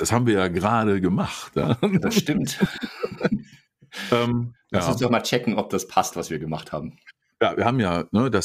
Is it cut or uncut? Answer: uncut